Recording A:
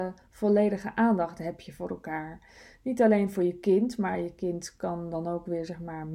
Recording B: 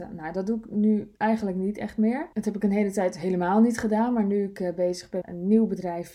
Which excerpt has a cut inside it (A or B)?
B